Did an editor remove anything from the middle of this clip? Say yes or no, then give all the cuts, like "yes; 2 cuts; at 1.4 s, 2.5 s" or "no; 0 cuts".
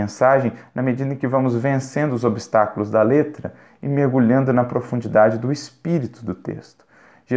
no; 0 cuts